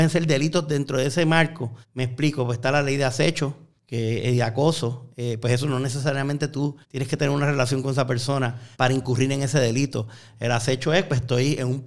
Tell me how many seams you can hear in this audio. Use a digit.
4